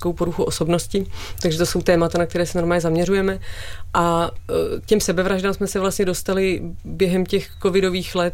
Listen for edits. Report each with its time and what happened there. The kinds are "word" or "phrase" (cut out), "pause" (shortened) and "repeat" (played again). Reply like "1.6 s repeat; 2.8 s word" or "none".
none